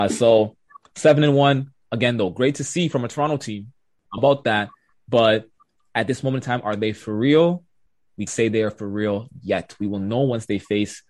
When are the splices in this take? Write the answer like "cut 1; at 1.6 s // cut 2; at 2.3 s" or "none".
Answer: cut 1; at 4.2 s // cut 2; at 8.3 s